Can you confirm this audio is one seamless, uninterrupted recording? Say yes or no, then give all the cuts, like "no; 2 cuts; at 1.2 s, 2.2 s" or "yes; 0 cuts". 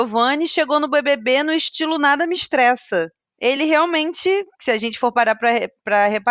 yes; 0 cuts